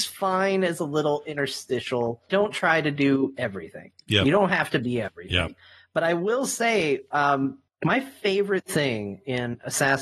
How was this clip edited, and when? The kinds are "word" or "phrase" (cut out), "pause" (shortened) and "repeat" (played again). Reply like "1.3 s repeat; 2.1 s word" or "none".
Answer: 2.3 s word; 7.7 s pause